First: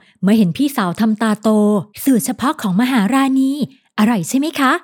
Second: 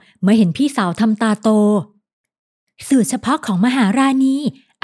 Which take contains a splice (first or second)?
first